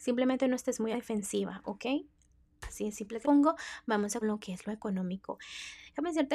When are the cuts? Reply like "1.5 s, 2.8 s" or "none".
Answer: 0.9 s, 3.2 s, 4.2 s